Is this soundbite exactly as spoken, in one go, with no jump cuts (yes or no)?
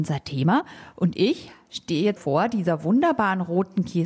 no